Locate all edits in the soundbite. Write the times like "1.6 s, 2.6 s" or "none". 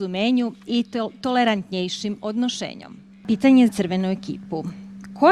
3.7 s